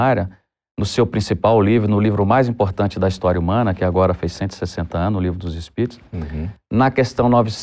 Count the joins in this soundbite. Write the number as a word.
zero